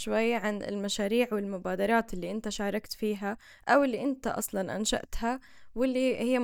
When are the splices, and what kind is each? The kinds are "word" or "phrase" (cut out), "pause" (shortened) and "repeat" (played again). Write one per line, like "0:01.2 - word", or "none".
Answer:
none